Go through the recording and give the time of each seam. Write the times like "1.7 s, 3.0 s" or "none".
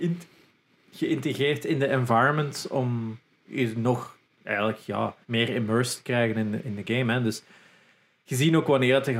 5.2 s